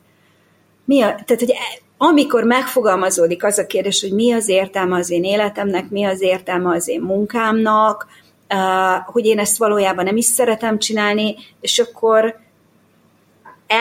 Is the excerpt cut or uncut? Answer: uncut